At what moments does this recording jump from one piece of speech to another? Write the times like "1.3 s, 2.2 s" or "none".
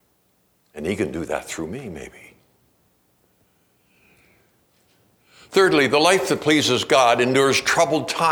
none